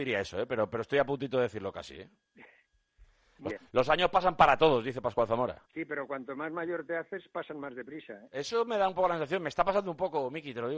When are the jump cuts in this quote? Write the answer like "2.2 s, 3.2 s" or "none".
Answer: 3.5 s, 5.6 s